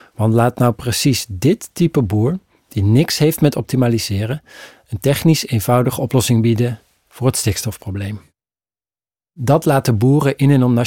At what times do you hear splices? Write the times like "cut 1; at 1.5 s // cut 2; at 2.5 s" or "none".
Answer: none

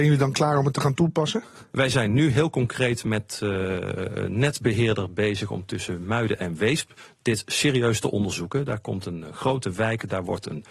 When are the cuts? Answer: none

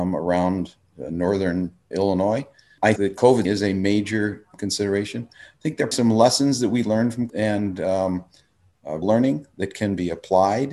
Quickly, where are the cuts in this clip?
cut 1; at 1.9 s // cut 2; at 3.0 s // cut 3; at 3.4 s // cut 4; at 4.5 s // cut 5; at 5.9 s // cut 6; at 7.3 s // cut 7; at 9.0 s

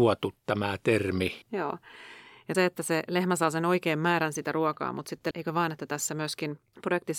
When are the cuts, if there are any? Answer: cut 1; at 1.4 s // cut 2; at 2.5 s // cut 3; at 5.3 s

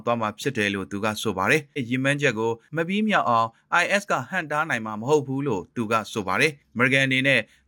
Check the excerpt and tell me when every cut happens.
cut 1; at 1.8 s

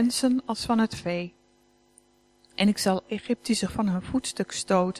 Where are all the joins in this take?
cut 1; at 3.0 s // cut 2; at 3.7 s

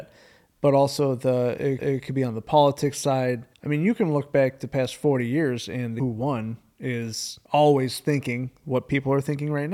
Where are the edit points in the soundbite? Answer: cut 1; at 1.8 s // cut 2; at 3.5 s // cut 3; at 6.0 s // cut 4; at 7.4 s

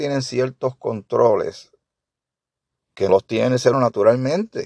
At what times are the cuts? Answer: cut 1; at 3.1 s // cut 2; at 3.7 s

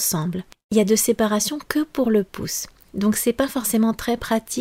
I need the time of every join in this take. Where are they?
none

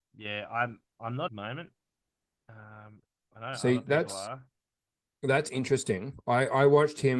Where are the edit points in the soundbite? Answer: cut 1; at 1.3 s

